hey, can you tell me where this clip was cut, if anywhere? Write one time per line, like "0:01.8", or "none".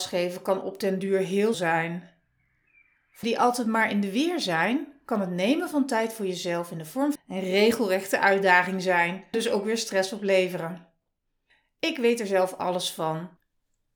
0:01.5
0:03.2
0:07.2
0:09.3